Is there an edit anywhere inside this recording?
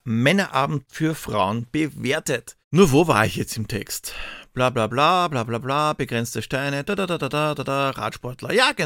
yes; 1 cut; at 2.6 s

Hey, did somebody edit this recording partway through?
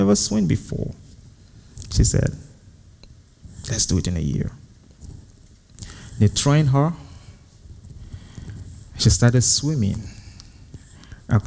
no; 0 cuts

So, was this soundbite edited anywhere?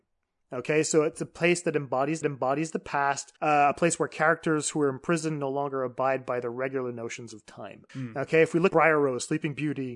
yes; 4 cuts; at 2.2 s, 3.4 s, 7.9 s, 8.7 s

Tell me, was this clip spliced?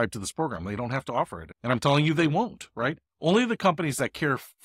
no; 0 cuts

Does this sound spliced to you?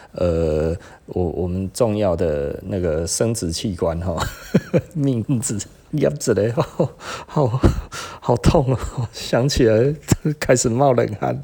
yes; 2 cuts; at 5.2 s, 5.9 s

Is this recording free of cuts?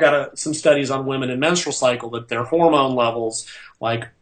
yes; 0 cuts

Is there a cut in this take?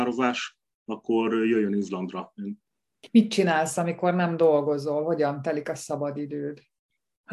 no; 0 cuts

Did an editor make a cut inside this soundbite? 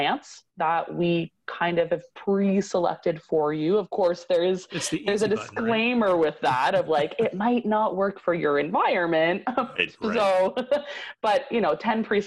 no; 0 cuts

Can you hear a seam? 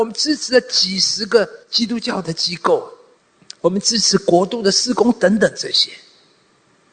yes; 2 cuts; at 1.6 s, 3.2 s

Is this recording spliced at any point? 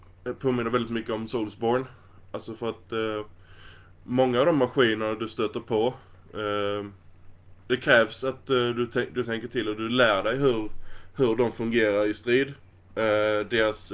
no; 0 cuts

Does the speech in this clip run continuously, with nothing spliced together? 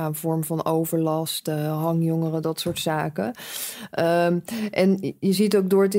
yes; 0 cuts

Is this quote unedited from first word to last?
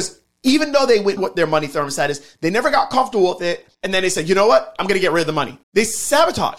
no; 3 cuts; at 1.2 s, 3.7 s, 5.6 s

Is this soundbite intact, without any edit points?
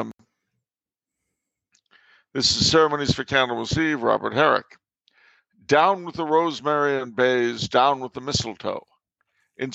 yes; 0 cuts

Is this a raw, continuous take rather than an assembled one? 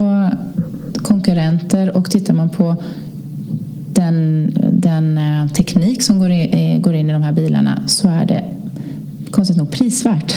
yes; 0 cuts

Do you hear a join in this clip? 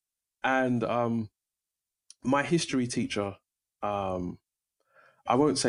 no; 0 cuts

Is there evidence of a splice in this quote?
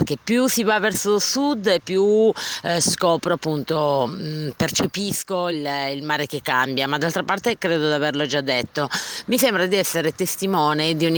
no; 0 cuts

